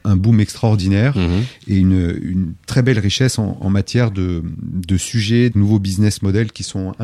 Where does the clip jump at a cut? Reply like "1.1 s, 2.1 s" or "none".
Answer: 5.5 s